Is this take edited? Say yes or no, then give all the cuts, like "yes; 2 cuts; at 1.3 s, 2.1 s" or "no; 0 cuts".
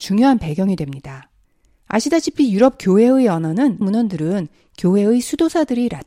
yes; 2 cuts; at 1.4 s, 3.8 s